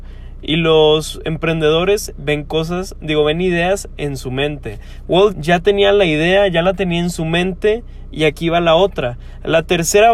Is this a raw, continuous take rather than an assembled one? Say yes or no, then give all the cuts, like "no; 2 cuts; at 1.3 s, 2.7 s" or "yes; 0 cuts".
no; 1 cut; at 5.3 s